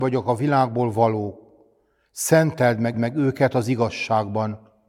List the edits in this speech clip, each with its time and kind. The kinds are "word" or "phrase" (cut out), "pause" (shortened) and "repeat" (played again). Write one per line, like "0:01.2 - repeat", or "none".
0:02.9 - repeat

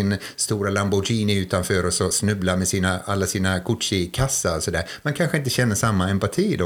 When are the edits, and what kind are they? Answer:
none

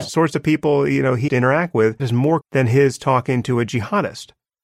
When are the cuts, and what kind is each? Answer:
0:01.3 - word
0:02.0 - word
0:02.4 - word

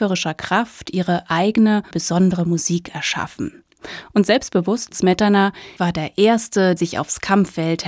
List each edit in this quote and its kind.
0:01.9 - word
0:04.9 - word
0:05.8 - word
0:06.8 - word

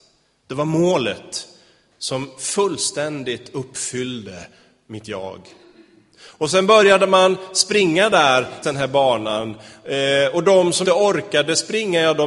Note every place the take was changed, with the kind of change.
0:08.6 - word
0:10.8 - word

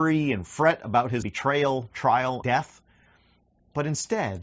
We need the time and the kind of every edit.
0:01.2 - word
0:02.4 - word

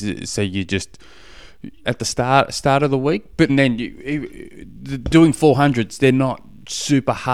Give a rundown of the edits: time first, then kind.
0:01.8 - phrase
0:03.5 - word

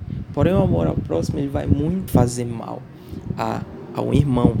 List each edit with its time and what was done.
0:02.1 - phrase

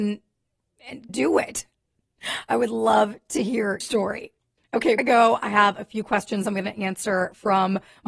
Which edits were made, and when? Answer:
0:01.1 - word
0:03.8 - word
0:05.0 - word

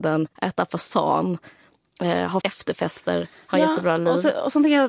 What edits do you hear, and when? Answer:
0:02.4 - word

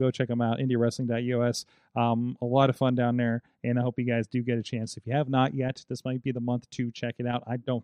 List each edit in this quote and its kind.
none

